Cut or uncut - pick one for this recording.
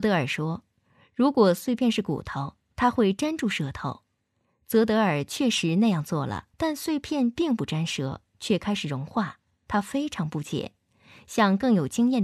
cut